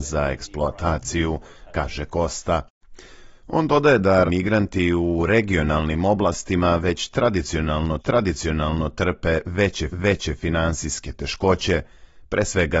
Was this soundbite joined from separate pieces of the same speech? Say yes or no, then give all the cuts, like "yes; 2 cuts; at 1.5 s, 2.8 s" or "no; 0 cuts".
yes; 3 cuts; at 4.3 s, 8.0 s, 9.9 s